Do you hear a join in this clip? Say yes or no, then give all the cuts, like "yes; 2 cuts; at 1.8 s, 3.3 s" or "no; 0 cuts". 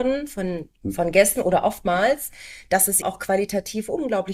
yes; 1 cut; at 3.0 s